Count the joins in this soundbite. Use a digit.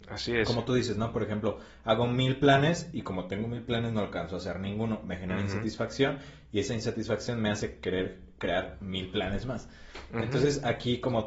0